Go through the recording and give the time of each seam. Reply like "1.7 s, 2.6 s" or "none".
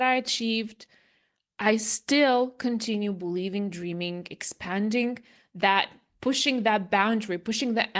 none